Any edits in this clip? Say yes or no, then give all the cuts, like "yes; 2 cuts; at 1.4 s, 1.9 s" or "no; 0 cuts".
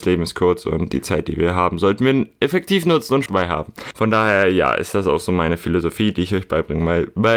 yes; 1 cut; at 3.3 s